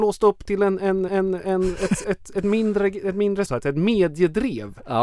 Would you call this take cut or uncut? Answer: cut